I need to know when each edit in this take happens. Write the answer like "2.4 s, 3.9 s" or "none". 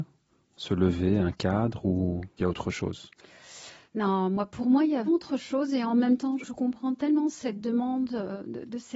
2.4 s, 5.1 s, 6.4 s